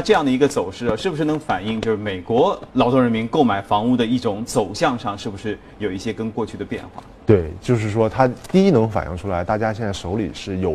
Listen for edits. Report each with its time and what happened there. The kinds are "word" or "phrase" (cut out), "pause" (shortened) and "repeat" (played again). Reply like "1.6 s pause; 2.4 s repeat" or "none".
2.7 s pause